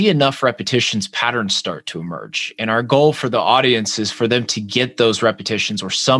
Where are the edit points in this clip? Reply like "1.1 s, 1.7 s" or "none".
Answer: none